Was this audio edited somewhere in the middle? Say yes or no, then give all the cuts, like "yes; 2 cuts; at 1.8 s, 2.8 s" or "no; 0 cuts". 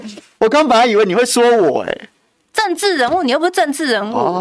no; 0 cuts